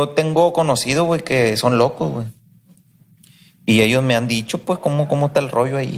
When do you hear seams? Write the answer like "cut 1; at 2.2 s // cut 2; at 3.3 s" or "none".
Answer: none